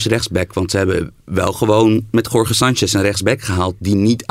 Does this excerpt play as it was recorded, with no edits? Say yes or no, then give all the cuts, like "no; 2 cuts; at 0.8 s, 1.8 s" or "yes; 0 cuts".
yes; 0 cuts